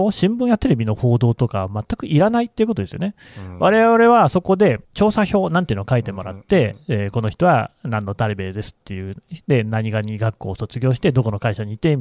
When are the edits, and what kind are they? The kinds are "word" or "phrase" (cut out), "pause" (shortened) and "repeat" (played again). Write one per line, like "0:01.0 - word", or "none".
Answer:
0:04.8 - pause